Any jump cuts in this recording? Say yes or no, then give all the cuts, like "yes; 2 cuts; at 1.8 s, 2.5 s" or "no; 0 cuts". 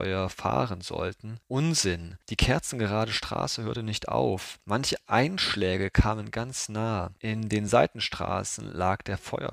no; 0 cuts